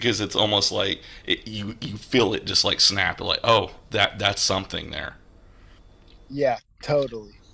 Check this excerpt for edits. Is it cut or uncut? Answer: uncut